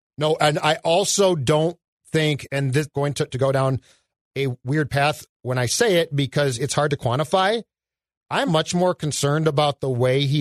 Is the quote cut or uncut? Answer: cut